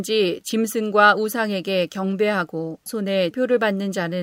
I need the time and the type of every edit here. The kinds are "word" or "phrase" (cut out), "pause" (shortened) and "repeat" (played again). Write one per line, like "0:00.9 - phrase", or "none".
0:02.9 - word
0:03.3 - word